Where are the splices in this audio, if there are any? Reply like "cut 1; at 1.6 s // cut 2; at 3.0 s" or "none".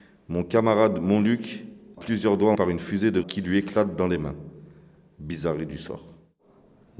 cut 1; at 2.0 s // cut 2; at 2.6 s // cut 3; at 3.2 s

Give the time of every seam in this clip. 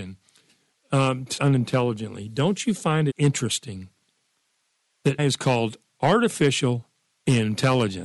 cut 1; at 1.4 s // cut 2; at 3.1 s // cut 3; at 5.2 s

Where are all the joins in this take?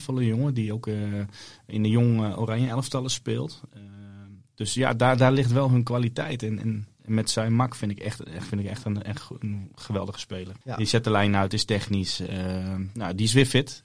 cut 1; at 10.6 s

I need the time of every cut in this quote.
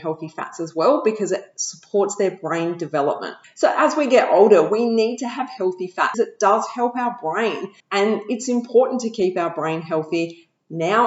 cut 1; at 6.1 s // cut 2; at 7.8 s

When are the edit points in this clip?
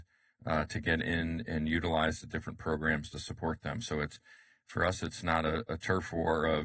none

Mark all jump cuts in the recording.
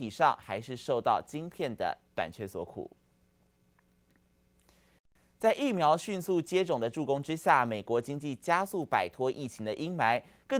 none

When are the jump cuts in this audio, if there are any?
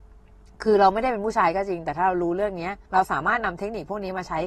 cut 1; at 2.9 s

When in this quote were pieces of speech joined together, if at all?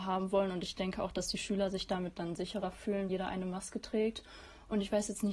cut 1; at 3.1 s

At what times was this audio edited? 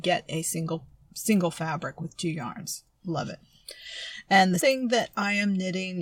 cut 1; at 4.6 s

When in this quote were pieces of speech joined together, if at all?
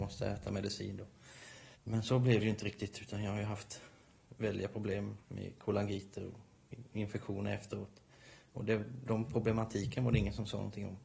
cut 1; at 1.7 s // cut 2; at 5.2 s

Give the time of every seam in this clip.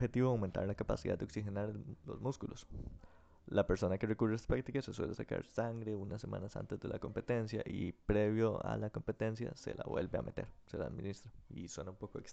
none

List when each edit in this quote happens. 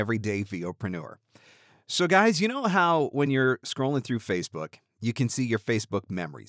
none

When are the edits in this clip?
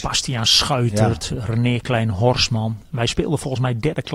none

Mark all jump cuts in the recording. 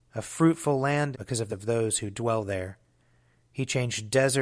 cut 1; at 1.1 s // cut 2; at 1.5 s

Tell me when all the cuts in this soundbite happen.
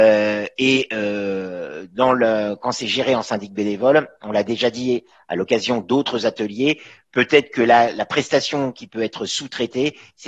none

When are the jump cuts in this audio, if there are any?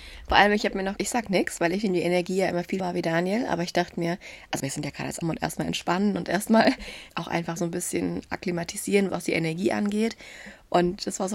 cut 1; at 1.0 s // cut 2; at 2.8 s // cut 3; at 4.6 s // cut 4; at 5.2 s // cut 5; at 7.1 s // cut 6; at 7.6 s // cut 7; at 9.1 s

